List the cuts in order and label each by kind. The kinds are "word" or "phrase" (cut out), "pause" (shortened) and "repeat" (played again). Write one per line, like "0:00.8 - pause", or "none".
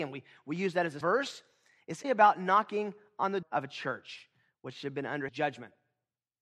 0:01.0 - word
0:02.0 - word
0:03.4 - word
0:05.3 - word